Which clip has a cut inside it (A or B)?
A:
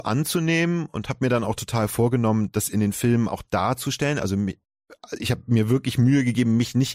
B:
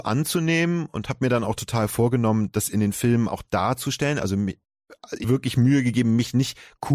B